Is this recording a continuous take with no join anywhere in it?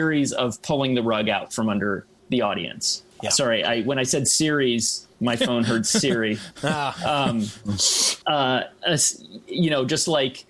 no; 4 cuts; at 2.2 s, 3.1 s, 5.1 s, 8.2 s

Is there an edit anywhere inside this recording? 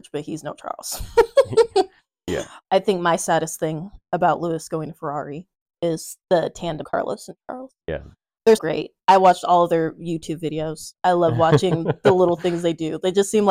yes; 6 cuts; at 2.6 s, 6.2 s, 6.8 s, 7.8 s, 8.6 s, 9.0 s

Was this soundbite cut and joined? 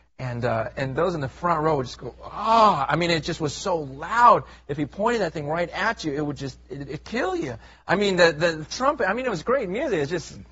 no; 0 cuts

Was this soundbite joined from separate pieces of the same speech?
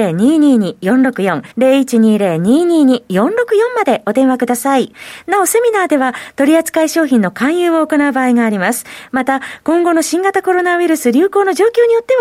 yes; 1 cut; at 1.5 s

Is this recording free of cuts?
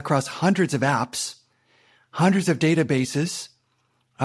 yes; 0 cuts

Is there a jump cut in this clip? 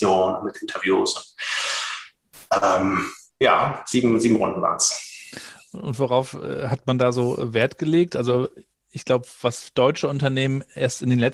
no; 0 cuts

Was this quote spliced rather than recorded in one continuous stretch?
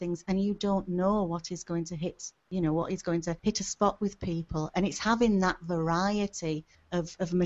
yes; 1 cut; at 3.4 s

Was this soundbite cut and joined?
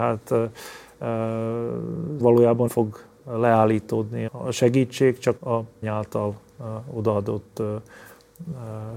yes; 5 cuts; at 2.2 s, 2.7 s, 4.3 s, 5.4 s, 5.8 s

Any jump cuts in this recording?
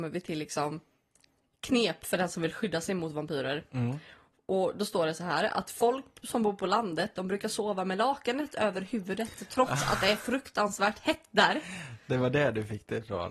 no; 0 cuts

